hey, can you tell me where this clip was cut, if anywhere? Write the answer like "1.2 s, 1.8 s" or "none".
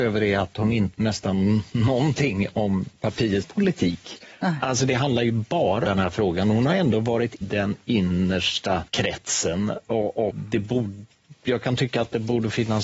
0.9 s, 3.4 s, 5.8 s, 7.4 s, 8.9 s, 10.3 s